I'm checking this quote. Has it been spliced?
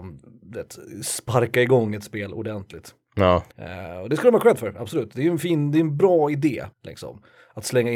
yes; 2 cuts; at 3.5 s, 6.7 s

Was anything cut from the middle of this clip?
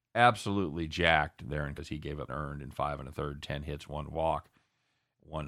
yes; 2 cuts; at 1.8 s, 2.3 s

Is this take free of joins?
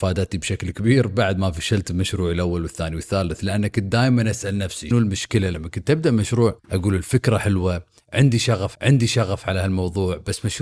no; 3 cuts; at 4.9 s, 6.6 s, 8.7 s

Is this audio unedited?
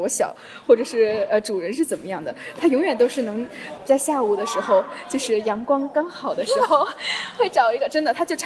no; 1 cut; at 3.8 s

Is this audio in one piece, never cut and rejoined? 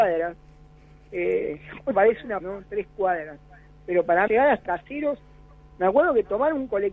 no; 4 cuts; at 1.9 s, 2.4 s, 4.3 s, 4.7 s

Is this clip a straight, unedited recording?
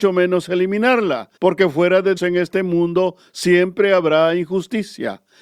no; 2 cuts; at 1.4 s, 2.2 s

